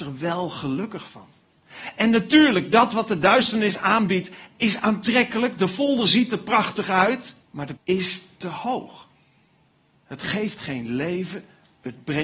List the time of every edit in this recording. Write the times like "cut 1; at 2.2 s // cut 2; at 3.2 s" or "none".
cut 1; at 7.4 s // cut 2; at 7.8 s